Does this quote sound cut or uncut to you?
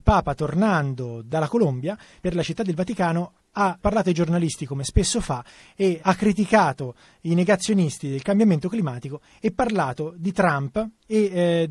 cut